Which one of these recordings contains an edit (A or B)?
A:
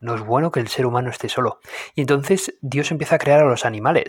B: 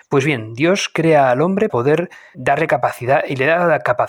B